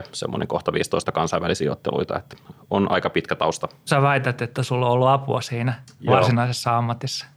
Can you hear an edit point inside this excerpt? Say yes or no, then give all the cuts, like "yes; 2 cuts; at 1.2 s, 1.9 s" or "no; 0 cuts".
yes; 2 cuts; at 1.0 s, 2.5 s